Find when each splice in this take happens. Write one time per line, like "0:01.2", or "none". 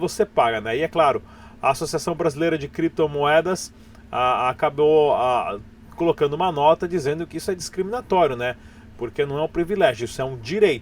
none

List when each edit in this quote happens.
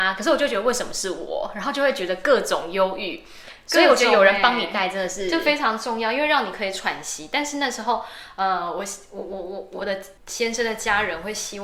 0:10.2

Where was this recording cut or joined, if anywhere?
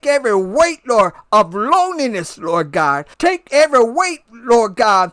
0:03.1

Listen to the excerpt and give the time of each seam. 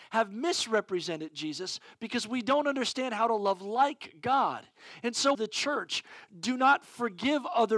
0:05.3

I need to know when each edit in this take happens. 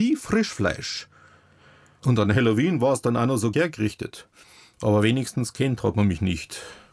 0:03.5

